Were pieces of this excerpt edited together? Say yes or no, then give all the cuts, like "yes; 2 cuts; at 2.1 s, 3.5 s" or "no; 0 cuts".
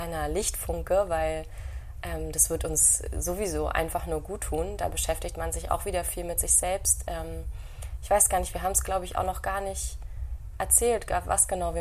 no; 0 cuts